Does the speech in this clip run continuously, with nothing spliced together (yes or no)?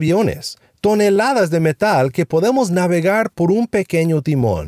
yes